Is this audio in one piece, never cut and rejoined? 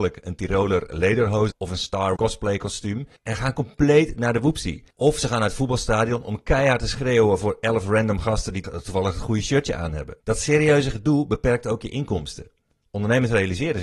no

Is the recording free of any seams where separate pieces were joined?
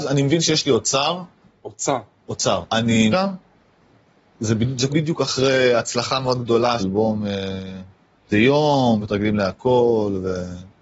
no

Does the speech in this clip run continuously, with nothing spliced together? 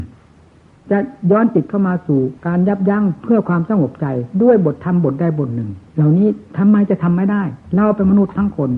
no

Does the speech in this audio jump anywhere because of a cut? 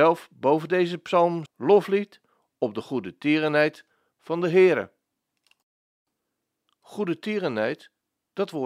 yes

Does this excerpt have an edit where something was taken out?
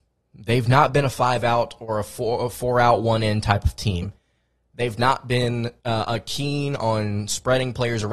no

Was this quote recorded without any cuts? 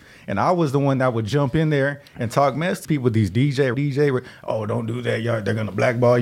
no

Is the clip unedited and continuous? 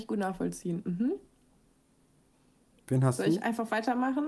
yes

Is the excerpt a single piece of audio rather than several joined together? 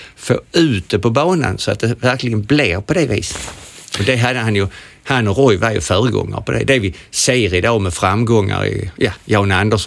yes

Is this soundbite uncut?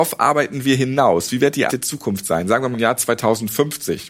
no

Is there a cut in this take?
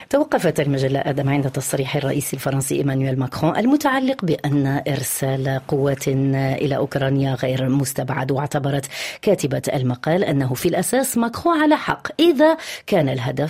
no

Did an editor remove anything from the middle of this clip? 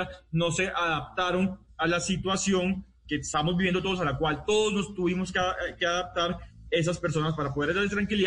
no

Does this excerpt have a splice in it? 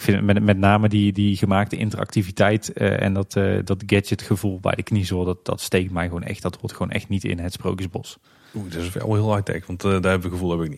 no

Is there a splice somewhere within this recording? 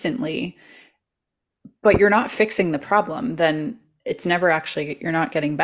no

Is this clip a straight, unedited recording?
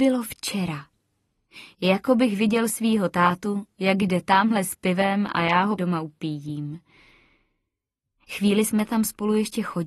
no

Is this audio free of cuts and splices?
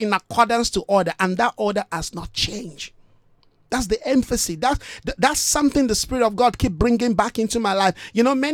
yes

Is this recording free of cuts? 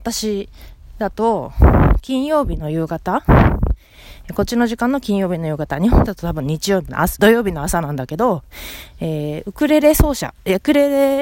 no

